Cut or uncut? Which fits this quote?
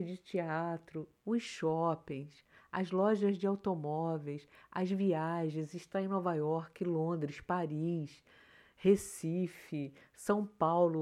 uncut